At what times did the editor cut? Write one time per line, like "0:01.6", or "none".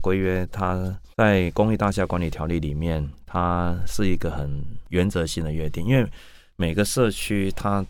0:01.1